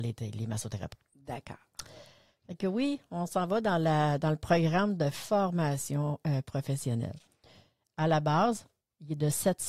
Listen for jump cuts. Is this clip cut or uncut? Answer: uncut